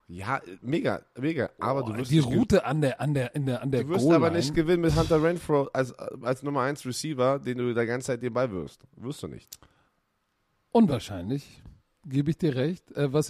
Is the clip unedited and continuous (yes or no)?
yes